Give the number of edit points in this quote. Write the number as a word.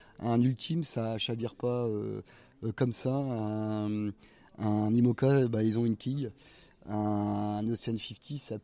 zero